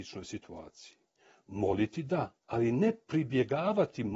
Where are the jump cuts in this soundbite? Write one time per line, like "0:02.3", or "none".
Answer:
0:02.4

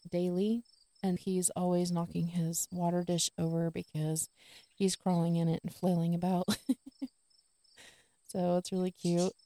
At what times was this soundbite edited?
0:01.2

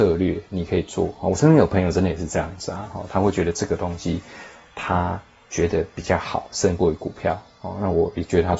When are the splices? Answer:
none

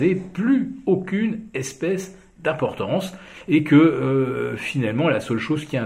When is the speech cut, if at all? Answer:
none

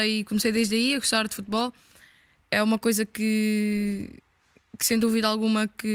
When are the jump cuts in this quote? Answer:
none

